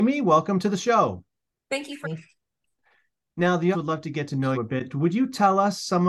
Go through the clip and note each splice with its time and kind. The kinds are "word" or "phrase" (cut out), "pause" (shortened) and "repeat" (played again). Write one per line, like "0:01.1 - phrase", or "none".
0:02.0 - word
0:03.7 - word
0:04.5 - word